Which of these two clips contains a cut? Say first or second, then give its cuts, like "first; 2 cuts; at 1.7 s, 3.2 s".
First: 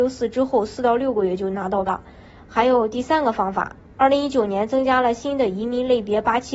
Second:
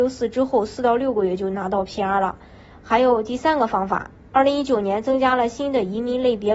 first; 1 cut; at 1.9 s